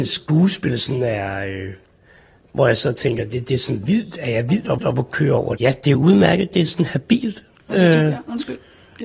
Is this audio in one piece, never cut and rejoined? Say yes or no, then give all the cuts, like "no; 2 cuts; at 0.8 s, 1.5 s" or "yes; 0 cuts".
no; 2 cuts; at 4.8 s, 5.6 s